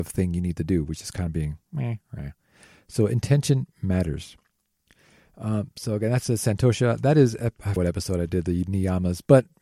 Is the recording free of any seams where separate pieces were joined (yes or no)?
no